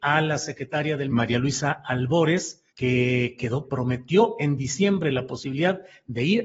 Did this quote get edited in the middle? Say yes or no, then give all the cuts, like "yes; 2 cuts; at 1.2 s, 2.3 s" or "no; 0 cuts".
yes; 3 cuts; at 1.1 s, 2.7 s, 3.6 s